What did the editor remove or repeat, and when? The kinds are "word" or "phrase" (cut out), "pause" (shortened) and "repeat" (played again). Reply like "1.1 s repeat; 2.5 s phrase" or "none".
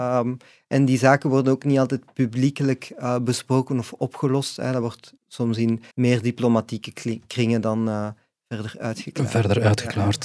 5.2 s pause; 5.9 s pause